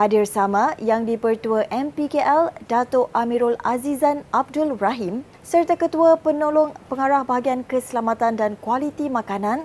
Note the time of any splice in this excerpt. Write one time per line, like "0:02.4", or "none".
0:05.3